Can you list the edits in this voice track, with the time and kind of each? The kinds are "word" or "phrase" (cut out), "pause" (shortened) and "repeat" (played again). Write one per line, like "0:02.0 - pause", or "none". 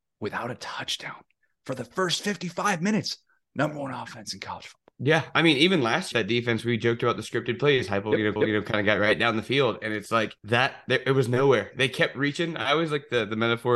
0:04.9 - pause
0:06.1 - phrase
0:08.4 - repeat
0:10.4 - pause